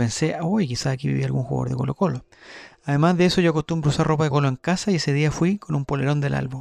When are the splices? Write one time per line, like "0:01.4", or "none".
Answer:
0:04.3